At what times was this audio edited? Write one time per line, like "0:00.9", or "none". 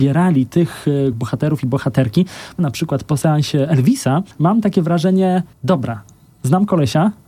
0:01.1
0:02.6
0:04.3
0:05.5